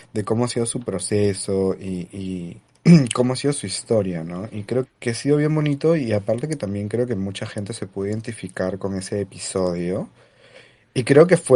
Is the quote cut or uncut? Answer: cut